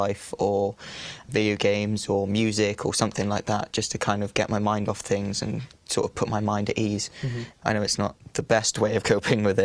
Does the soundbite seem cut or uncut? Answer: uncut